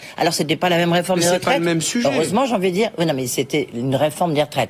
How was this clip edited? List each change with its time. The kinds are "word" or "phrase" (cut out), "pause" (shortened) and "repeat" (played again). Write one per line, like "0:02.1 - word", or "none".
none